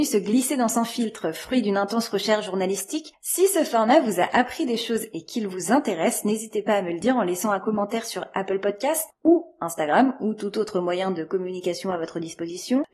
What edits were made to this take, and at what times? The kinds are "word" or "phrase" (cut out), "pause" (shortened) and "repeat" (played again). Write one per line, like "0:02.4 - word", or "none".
none